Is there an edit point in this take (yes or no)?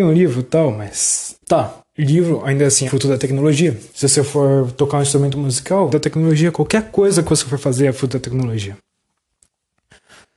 yes